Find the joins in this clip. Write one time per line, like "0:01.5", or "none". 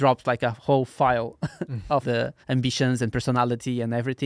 0:02.0
0:02.4